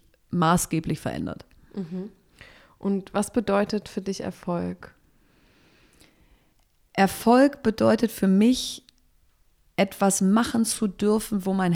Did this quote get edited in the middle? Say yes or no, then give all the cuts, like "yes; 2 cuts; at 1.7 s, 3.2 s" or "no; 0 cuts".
no; 0 cuts